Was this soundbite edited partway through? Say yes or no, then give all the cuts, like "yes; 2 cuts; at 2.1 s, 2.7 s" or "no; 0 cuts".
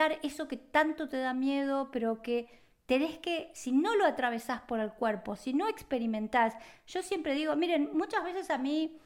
no; 0 cuts